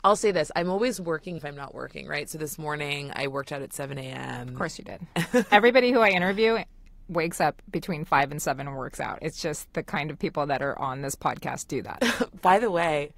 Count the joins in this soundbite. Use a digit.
1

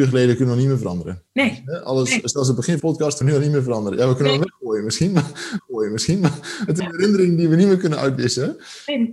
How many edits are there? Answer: 5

